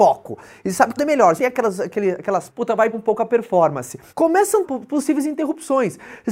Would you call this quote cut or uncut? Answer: cut